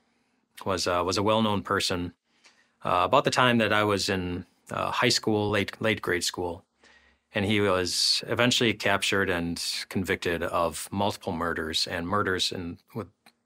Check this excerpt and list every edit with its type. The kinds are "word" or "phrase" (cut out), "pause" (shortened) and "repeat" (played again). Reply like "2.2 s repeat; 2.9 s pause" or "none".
none